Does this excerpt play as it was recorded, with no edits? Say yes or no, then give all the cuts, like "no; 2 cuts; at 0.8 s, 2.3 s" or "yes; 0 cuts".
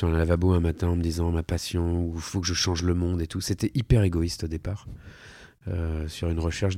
yes; 0 cuts